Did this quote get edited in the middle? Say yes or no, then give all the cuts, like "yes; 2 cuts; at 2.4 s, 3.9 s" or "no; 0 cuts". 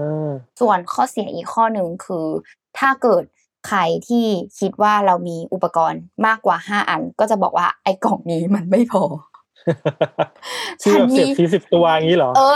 no; 0 cuts